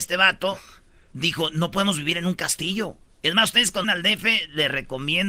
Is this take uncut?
no; 2 cuts; at 3.1 s, 3.8 s

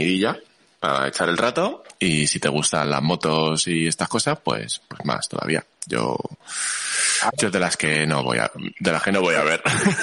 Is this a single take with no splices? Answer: yes; 0 cuts

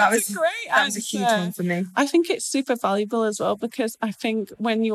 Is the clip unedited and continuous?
yes; 0 cuts

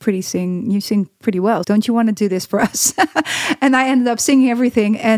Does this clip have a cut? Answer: yes; 1 cut; at 1.6 s

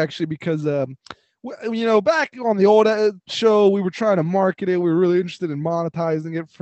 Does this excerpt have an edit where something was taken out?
no; 0 cuts

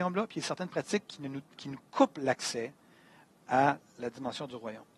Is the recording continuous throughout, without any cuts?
yes; 0 cuts

